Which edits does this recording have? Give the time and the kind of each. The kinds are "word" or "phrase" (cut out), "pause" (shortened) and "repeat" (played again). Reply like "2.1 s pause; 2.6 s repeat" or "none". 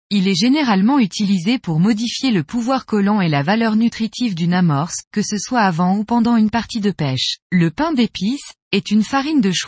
5.0 s pause; 7.4 s pause

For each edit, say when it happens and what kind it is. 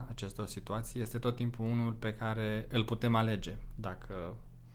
none

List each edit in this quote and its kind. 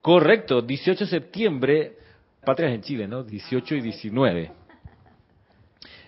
2.4 s word

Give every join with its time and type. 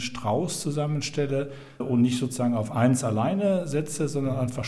1.8 s word

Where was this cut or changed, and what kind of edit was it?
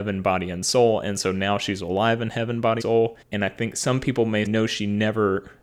2.8 s word; 3.2 s pause; 4.5 s word

